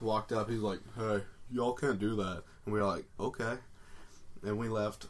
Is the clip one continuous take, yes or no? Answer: yes